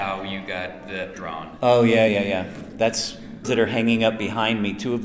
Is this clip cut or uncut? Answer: cut